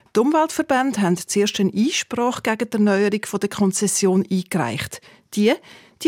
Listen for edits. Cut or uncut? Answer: uncut